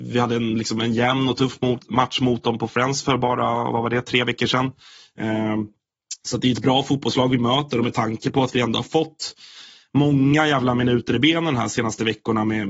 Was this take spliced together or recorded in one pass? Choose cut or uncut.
uncut